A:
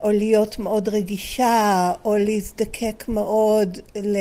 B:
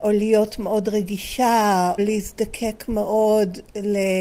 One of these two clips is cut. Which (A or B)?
B